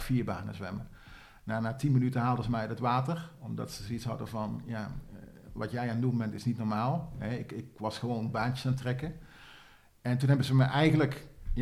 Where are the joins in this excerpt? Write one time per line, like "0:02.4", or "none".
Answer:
none